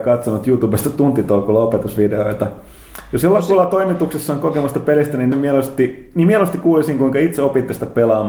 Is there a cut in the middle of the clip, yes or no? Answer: yes